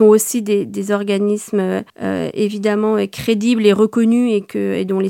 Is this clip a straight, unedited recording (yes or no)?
no